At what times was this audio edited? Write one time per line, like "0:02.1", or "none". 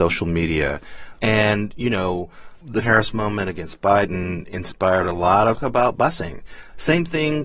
0:02.8
0:05.6